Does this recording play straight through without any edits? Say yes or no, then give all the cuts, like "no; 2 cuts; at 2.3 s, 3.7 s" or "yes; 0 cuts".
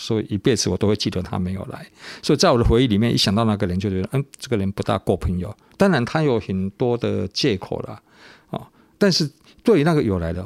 yes; 0 cuts